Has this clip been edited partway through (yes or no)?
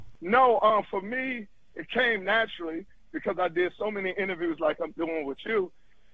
no